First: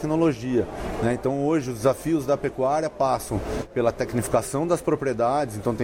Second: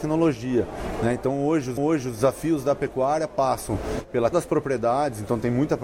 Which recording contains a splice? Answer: second; 2 cuts; at 1.8 s, 4.3 s

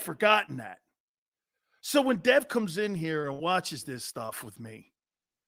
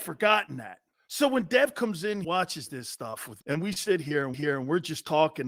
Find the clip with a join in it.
second; 4 cuts; at 0.9 s, 2.2 s, 3.4 s, 4.3 s

